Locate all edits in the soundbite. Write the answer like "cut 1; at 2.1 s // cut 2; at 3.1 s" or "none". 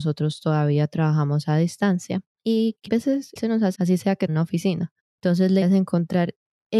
cut 1; at 2.3 s // cut 2; at 2.9 s // cut 3; at 3.4 s // cut 4; at 3.7 s // cut 5; at 4.3 s // cut 6; at 5.0 s // cut 7; at 5.6 s